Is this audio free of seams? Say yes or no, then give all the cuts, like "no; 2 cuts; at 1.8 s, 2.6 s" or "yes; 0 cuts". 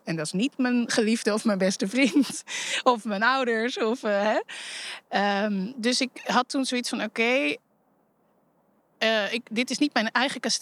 yes; 0 cuts